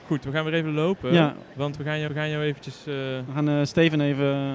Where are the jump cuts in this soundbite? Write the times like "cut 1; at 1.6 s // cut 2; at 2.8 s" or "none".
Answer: cut 1; at 2.1 s